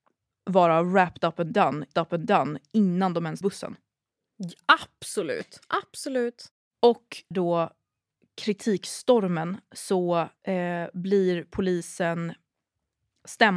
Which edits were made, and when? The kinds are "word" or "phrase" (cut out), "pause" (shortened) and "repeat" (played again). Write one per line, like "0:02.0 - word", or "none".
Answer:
0:01.9 - repeat
0:03.4 - word
0:07.3 - phrase
0:10.4 - pause